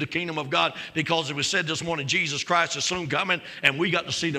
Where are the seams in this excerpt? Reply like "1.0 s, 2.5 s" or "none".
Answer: none